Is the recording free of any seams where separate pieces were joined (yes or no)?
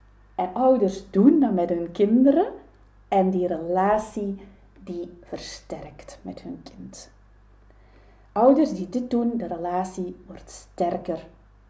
yes